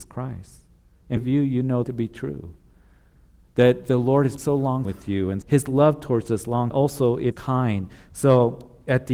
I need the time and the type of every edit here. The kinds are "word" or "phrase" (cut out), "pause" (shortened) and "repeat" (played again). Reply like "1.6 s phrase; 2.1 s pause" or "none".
1.2 s word; 1.8 s word; 4.4 s word; 4.8 s word; 5.4 s word; 6.7 s word; 7.3 s word